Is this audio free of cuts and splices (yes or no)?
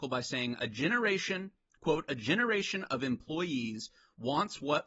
yes